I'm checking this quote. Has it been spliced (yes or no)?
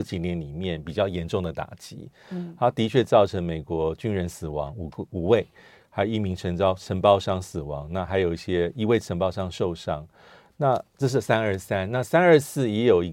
no